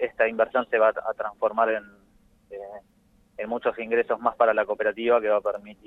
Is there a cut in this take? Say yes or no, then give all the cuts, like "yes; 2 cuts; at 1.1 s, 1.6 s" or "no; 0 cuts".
no; 0 cuts